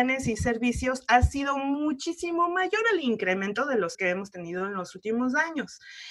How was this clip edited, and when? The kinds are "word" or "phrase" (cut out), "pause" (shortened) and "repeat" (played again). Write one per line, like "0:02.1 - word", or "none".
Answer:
0:03.9 - word